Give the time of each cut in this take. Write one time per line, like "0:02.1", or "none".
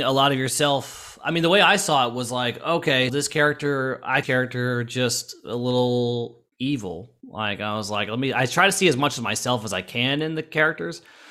0:03.1
0:04.2
0:06.5